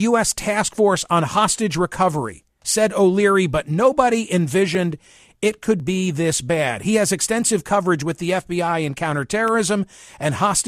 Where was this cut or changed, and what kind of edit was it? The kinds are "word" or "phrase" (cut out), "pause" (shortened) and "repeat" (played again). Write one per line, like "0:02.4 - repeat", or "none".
none